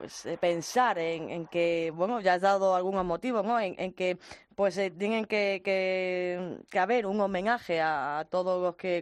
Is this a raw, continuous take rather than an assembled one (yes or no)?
yes